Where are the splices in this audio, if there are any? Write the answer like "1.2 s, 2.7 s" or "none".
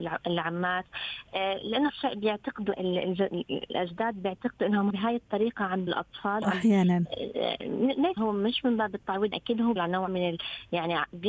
1.9 s, 2.7 s, 4.9 s, 5.9 s, 6.4 s, 8.2 s, 9.3 s, 9.8 s, 10.1 s